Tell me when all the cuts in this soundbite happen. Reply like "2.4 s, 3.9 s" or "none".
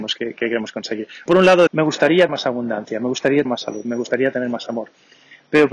1.3 s, 1.7 s, 2.3 s, 3.4 s